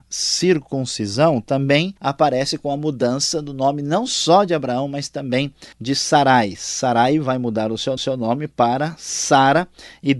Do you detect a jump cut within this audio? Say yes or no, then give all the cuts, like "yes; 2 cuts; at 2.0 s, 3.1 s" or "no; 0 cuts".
yes; 3 cuts; at 2.0 s, 5.7 s, 8.0 s